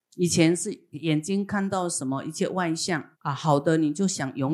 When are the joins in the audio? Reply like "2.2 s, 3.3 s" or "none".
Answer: 3.1 s

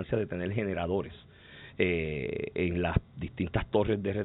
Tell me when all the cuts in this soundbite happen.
none

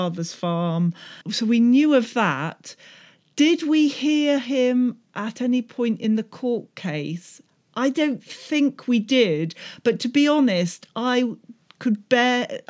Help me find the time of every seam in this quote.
1.2 s

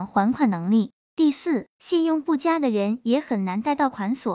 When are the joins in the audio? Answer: 1.7 s

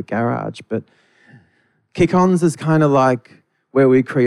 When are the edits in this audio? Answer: none

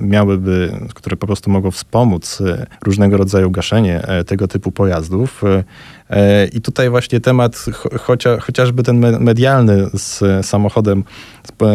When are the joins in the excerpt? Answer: 2.7 s

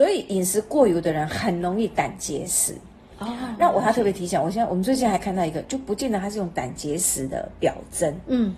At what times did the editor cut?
none

